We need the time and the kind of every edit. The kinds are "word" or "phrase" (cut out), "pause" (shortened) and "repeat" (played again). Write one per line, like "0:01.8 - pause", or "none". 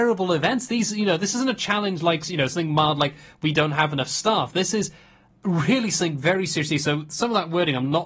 none